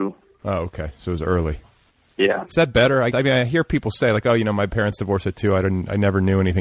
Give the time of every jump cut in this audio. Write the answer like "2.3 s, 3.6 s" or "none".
1.9 s, 3.1 s